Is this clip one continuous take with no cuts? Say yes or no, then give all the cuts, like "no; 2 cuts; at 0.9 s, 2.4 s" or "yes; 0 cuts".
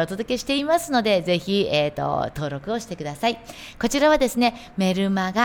yes; 0 cuts